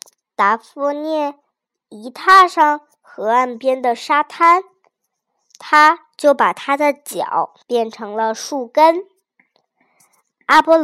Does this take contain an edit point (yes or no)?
yes